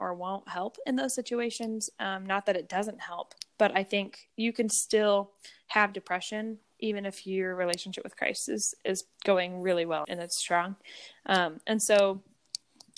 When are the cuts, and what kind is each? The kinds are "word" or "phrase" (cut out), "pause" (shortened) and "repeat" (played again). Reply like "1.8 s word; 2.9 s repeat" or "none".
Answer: 9.1 s pause; 10.0 s word